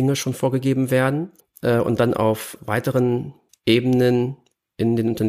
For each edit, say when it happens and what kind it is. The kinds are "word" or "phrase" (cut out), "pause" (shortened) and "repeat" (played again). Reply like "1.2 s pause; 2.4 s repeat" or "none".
1.4 s pause; 2.6 s word; 3.5 s pause